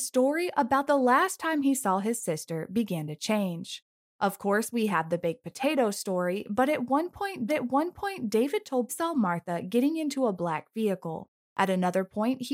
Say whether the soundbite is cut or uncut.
cut